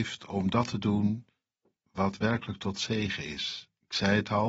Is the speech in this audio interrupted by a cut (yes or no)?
no